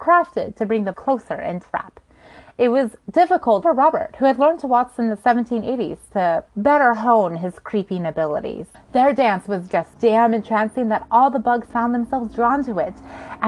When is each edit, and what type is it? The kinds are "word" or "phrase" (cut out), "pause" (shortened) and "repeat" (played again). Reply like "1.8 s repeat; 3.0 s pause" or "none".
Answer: 0.9 s word; 1.6 s word; 3.6 s word; 6.5 s pause; 8.7 s pause; 9.9 s word